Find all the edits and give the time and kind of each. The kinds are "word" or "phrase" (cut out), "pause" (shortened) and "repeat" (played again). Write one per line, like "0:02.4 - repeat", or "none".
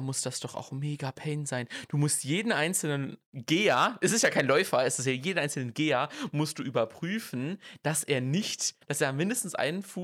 0:03.2 - pause